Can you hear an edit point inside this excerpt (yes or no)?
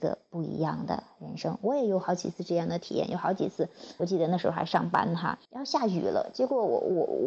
yes